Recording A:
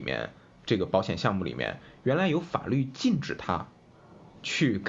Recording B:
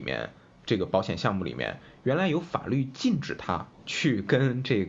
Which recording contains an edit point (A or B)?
B